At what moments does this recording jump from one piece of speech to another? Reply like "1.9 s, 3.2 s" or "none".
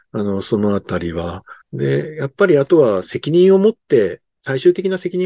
1.6 s, 4.3 s